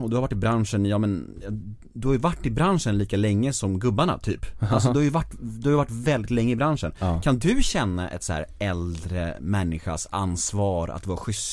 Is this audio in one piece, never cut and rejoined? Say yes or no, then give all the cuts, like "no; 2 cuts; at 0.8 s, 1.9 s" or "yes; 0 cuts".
yes; 0 cuts